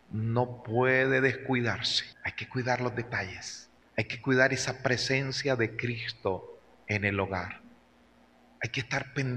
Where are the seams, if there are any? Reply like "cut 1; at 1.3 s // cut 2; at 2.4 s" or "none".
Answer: cut 1; at 2.1 s // cut 2; at 3.8 s

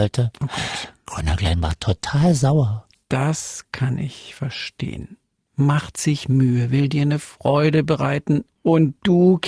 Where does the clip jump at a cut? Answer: none

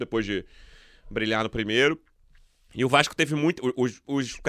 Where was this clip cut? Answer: none

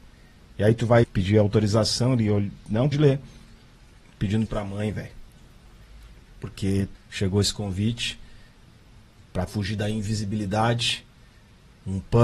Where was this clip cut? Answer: cut 1; at 1.0 s // cut 2; at 2.9 s // cut 3; at 4.5 s // cut 4; at 6.9 s // cut 5; at 9.5 s

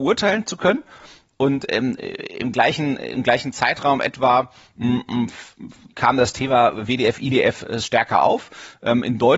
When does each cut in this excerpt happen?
none

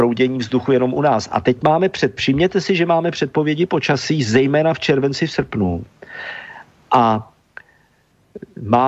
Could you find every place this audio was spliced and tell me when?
none

